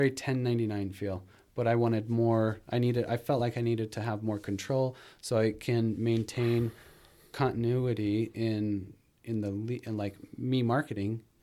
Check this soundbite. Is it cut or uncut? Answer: uncut